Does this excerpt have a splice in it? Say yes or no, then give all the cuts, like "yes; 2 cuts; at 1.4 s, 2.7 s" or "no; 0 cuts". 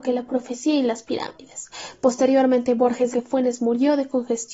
yes; 1 cut; at 3.1 s